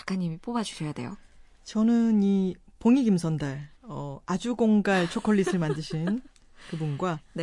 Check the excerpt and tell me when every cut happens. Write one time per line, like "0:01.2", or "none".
0:03.7